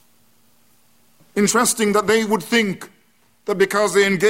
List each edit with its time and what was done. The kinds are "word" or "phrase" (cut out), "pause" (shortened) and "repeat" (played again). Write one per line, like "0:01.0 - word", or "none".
none